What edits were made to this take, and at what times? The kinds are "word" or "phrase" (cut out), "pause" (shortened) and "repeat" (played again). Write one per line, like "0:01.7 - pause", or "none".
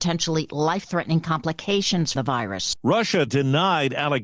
0:02.2 - word
0:03.3 - word